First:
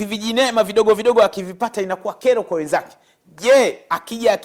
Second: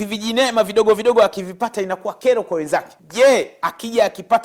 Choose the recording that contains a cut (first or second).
second